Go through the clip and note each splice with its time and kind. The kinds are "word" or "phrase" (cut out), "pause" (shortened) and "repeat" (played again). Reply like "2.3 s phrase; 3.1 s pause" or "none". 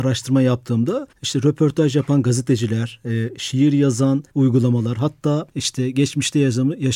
1.1 s pause; 4.3 s pause; 5.5 s pause